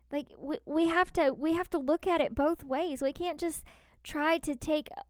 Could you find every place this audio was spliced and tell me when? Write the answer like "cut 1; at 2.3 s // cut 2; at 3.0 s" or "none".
none